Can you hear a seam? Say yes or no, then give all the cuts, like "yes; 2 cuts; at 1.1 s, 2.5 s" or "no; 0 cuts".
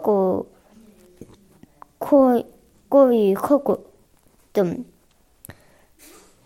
no; 0 cuts